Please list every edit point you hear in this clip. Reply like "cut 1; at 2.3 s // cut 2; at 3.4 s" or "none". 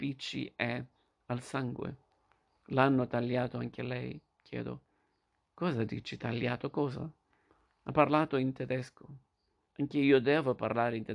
none